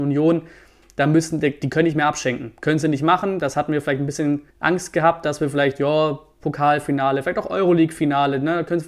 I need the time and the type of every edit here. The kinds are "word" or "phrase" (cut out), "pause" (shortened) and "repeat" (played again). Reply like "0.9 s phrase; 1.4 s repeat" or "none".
4.5 s pause